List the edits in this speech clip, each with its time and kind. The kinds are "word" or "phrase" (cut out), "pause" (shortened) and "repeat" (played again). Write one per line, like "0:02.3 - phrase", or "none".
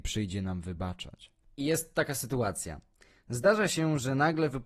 none